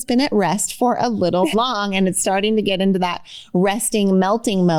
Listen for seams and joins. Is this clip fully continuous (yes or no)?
no